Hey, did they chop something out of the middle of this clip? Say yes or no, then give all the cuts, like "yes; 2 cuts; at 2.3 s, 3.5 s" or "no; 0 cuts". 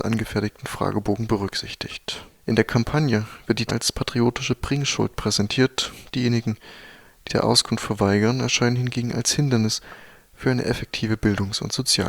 yes; 2 cuts; at 3.7 s, 7.3 s